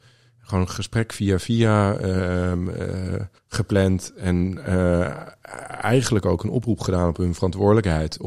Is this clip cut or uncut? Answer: cut